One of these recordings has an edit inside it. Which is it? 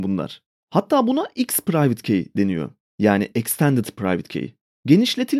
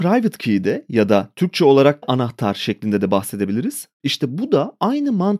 second; 1 cut; at 2.0 s

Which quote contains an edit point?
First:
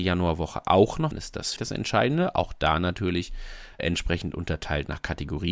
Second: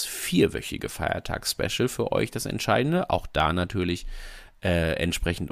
first; 3 cuts; at 1.1 s, 1.6 s, 3.8 s

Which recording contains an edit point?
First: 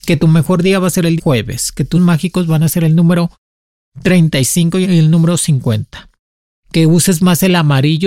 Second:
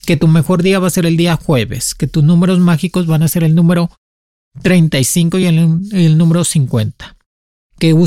first; 3 cuts; at 1.2 s, 1.9 s, 4.8 s

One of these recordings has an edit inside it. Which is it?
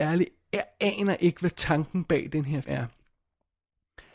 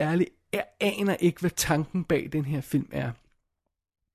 first; 1 cut; at 2.6 s

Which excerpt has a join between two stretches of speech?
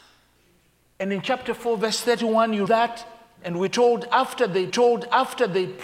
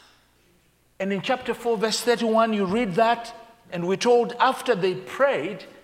first; 2 cuts; at 2.7 s, 4.7 s

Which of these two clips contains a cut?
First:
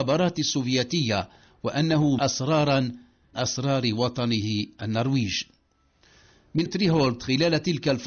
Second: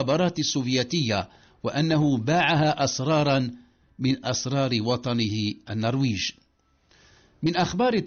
first; 3 cuts; at 2.2 s, 3.3 s, 6.7 s

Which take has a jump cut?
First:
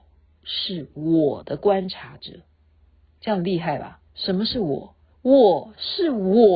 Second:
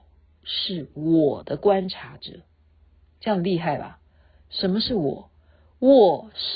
first; 2 cuts; at 4.1 s, 5.1 s

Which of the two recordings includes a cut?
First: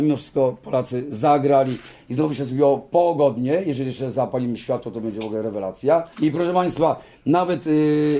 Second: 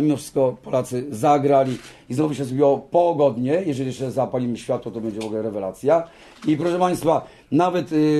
first; 1 cut; at 6.1 s

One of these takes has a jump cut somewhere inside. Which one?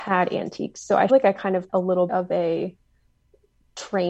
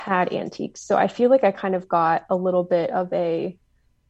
first; 3 cuts; at 1.1 s, 1.7 s, 2.1 s

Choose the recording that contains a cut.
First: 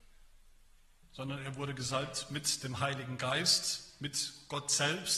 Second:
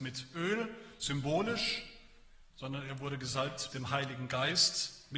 second; 2 cuts; at 2.5 s, 3.7 s

